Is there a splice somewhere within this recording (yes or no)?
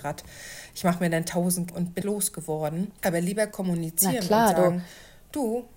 yes